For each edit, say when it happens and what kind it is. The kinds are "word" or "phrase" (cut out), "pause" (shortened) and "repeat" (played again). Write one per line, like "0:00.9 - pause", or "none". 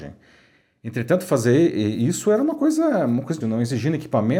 0:03.4 - word